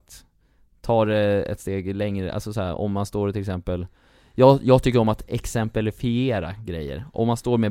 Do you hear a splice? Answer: no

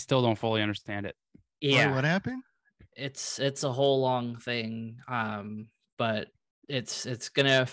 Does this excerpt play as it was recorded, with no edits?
yes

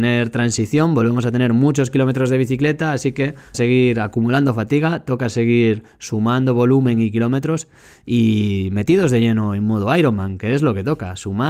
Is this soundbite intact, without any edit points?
no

